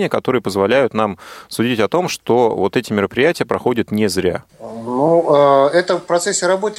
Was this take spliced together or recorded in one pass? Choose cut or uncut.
cut